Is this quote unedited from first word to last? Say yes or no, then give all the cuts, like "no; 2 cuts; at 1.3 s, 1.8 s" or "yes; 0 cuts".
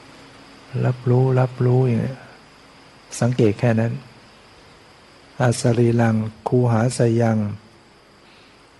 yes; 0 cuts